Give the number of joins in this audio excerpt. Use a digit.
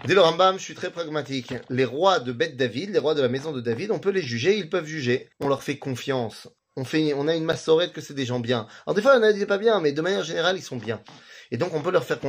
2